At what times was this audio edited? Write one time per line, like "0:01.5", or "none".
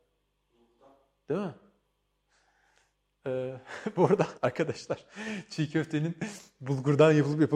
0:04.4